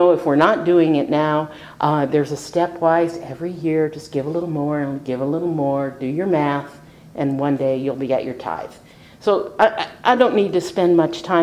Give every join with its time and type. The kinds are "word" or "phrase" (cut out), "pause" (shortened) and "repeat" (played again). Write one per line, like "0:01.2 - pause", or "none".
none